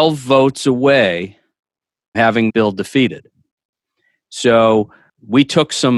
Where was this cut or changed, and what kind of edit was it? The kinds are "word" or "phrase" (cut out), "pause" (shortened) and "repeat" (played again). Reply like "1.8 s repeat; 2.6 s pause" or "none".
2.1 s word; 2.5 s word